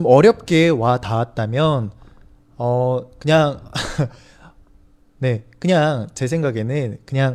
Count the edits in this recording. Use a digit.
0